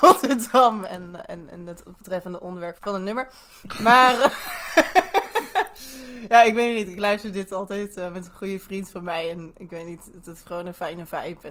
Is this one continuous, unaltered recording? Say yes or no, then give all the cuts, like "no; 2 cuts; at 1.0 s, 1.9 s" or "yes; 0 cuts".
no; 1 cut; at 2.8 s